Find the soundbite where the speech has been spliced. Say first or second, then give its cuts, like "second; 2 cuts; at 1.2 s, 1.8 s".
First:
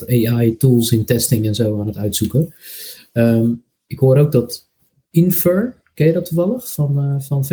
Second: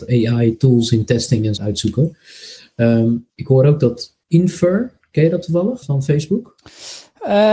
second; 4 cuts; at 1.6 s, 3.3 s, 4.2 s, 5.8 s